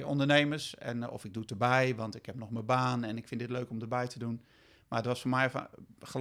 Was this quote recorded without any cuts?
yes; 0 cuts

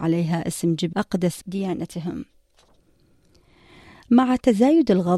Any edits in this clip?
yes; 2 cuts; at 0.9 s, 1.4 s

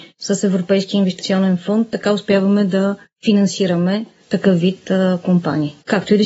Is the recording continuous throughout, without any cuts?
yes; 0 cuts

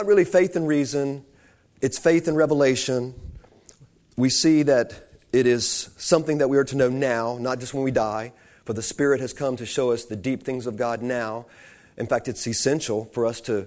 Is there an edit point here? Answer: no; 0 cuts

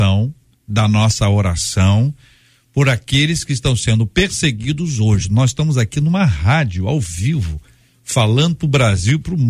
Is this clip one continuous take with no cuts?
yes; 0 cuts

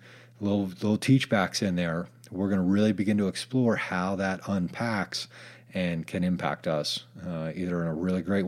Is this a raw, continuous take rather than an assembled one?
yes; 0 cuts

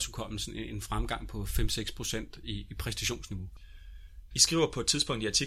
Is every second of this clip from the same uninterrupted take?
yes; 0 cuts

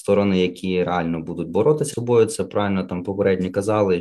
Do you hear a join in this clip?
yes; 1 cut; at 1.9 s

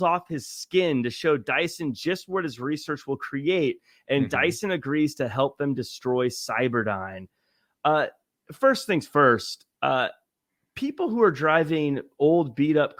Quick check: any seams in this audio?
no; 0 cuts

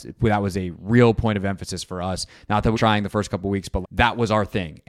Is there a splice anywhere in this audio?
yes; 2 cuts; at 2.7 s, 3.8 s

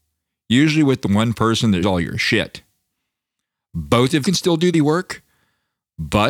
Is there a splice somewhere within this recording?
yes; 3 cuts; at 1.8 s, 4.2 s, 4.7 s

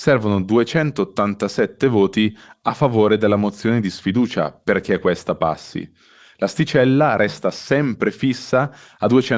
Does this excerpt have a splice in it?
no; 0 cuts

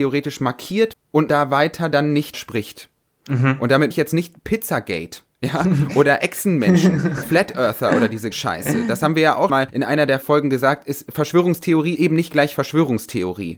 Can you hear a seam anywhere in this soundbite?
yes; 9 cuts; at 0.9 s, 1.3 s, 2.3 s, 3.9 s, 7.2 s, 8.3 s, 9.5 s, 10.2 s, 12.0 s

